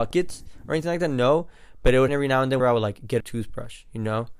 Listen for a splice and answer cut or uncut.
cut